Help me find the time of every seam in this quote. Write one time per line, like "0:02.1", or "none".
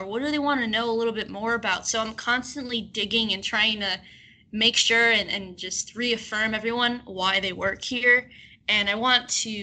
none